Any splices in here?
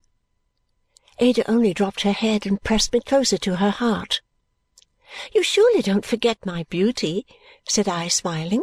no; 0 cuts

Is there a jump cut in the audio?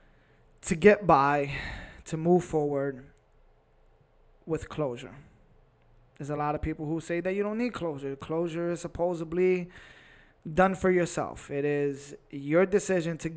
no; 0 cuts

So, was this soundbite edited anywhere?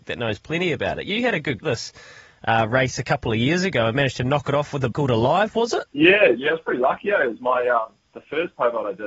yes; 3 cuts; at 1.6 s, 4.9 s, 5.9 s

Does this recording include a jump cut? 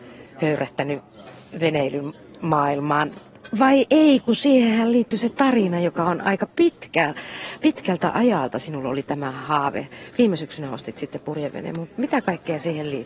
no; 0 cuts

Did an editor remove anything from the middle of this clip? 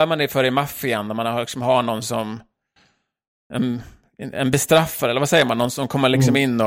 no; 0 cuts

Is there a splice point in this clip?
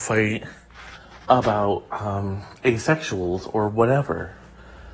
no; 0 cuts

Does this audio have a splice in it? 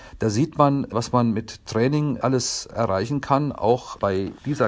no; 0 cuts

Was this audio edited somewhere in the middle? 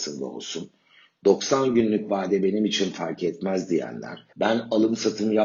yes; 1 cut; at 4.3 s

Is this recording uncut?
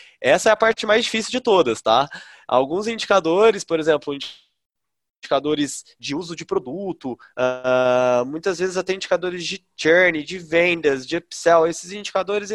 yes; 0 cuts

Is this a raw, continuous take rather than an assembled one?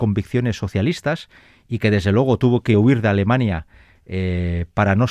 yes; 0 cuts

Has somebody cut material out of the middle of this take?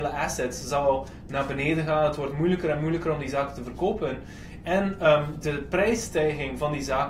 no; 0 cuts

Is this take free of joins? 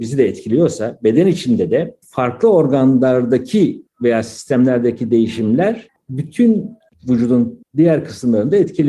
yes; 0 cuts

